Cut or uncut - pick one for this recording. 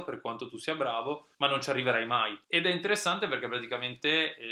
cut